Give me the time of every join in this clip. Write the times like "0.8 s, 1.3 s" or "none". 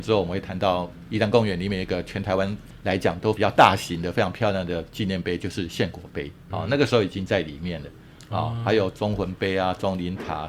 6.5 s